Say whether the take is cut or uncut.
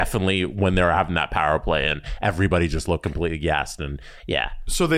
uncut